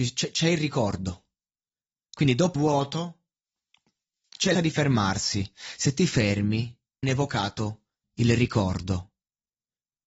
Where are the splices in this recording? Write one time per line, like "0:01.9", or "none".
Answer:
0:02.6
0:04.5
0:07.0